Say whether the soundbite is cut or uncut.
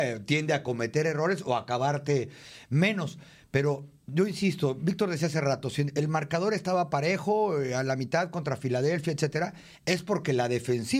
uncut